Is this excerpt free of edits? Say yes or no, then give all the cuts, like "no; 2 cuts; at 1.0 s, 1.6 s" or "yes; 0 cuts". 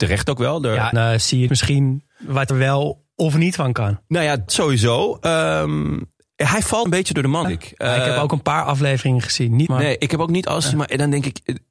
no; 7 cuts; at 0.9 s, 1.5 s, 2.5 s, 4.5 s, 6.9 s, 7.4 s, 9.7 s